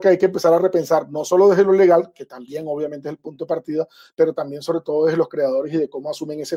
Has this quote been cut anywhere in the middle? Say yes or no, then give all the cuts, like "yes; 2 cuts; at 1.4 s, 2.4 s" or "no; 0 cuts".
no; 0 cuts